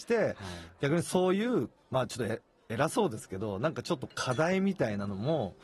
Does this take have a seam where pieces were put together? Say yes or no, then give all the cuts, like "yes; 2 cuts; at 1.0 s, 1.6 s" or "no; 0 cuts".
no; 0 cuts